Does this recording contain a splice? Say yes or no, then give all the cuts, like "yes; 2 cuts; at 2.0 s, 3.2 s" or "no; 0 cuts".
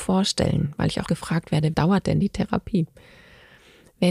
yes; 2 cuts; at 1.1 s, 1.7 s